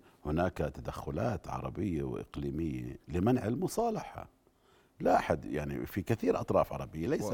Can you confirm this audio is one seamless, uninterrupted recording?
yes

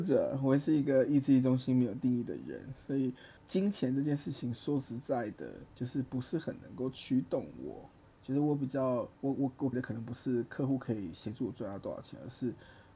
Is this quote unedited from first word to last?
no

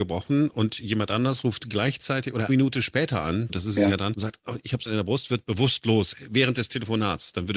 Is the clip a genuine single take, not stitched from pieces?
no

